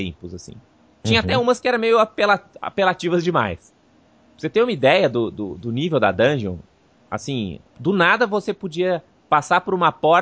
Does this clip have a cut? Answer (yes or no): yes